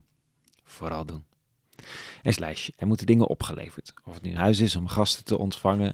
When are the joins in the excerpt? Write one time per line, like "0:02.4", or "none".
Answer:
0:02.3
0:04.4

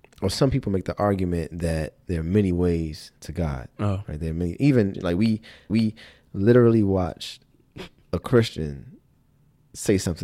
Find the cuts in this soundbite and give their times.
0:03.2
0:04.9
0:05.7
0:08.0

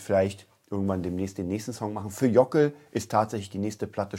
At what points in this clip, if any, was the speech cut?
none

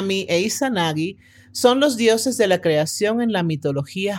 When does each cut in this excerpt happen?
none

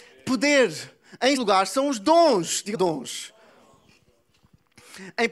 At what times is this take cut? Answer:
0:01.4
0:02.7

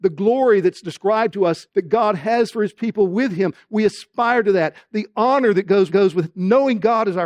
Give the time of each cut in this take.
0:01.7
0:05.9

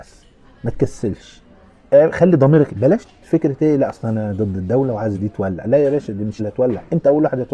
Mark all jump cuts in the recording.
0:02.7
0:05.2
0:06.4

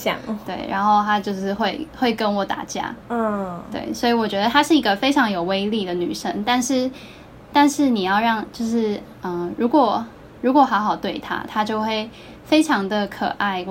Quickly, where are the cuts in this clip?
none

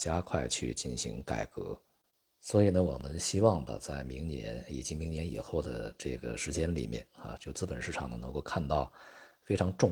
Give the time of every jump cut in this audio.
none

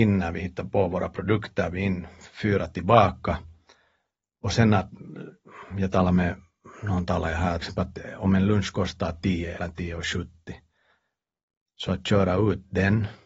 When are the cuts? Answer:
0:01.7
0:07.6
0:09.6

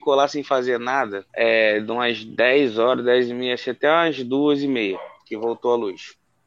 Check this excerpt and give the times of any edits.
0:01.3

